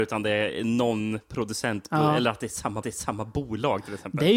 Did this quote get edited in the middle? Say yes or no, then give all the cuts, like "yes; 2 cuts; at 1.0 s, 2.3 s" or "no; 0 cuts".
yes; 1 cut; at 2.8 s